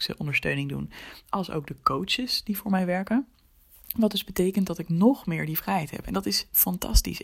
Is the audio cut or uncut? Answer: uncut